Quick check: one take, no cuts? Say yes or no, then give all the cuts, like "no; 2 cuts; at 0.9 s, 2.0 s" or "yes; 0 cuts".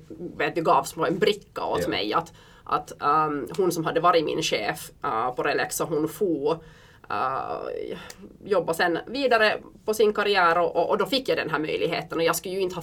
yes; 0 cuts